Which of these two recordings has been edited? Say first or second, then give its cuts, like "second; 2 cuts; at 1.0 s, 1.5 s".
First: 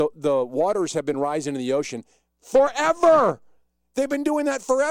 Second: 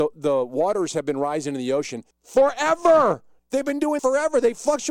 second; 3 cuts; at 2.1 s, 3.4 s, 4.0 s